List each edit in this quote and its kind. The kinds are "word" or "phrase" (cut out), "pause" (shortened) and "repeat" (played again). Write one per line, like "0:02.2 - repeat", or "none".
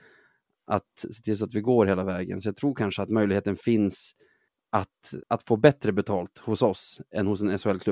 0:05.2 - pause